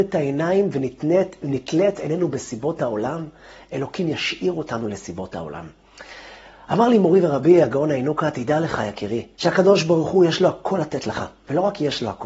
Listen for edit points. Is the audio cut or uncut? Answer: cut